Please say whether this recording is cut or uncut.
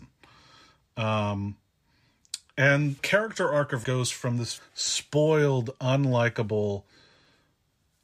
cut